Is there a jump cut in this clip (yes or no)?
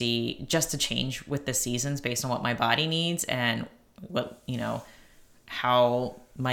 no